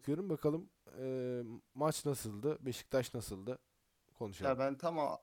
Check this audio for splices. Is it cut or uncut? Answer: uncut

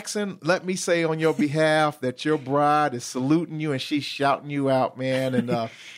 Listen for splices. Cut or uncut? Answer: uncut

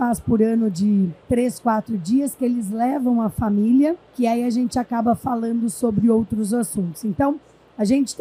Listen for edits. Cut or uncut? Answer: cut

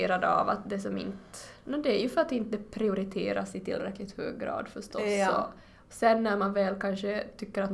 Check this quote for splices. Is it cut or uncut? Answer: uncut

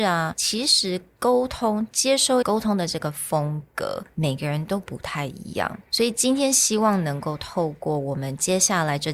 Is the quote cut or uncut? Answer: cut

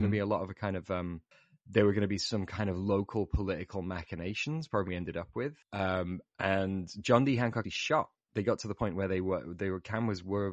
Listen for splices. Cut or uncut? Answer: cut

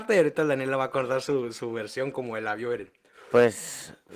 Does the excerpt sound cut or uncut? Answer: uncut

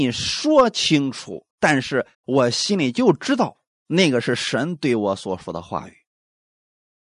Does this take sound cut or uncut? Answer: cut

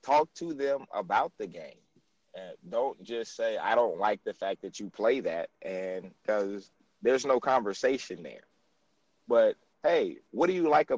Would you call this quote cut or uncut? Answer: uncut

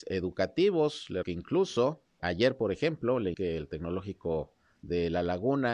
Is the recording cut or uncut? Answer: cut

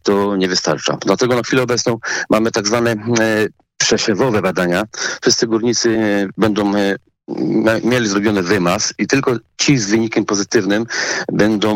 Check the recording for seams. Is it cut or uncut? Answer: uncut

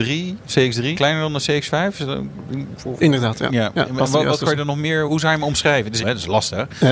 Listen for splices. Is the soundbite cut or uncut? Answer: cut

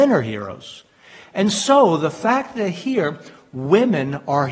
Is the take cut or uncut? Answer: uncut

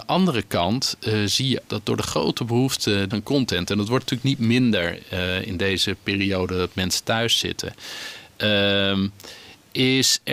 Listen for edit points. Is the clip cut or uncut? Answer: cut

